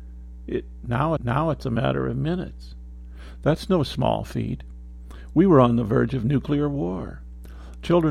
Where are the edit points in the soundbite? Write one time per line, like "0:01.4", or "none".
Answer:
0:01.2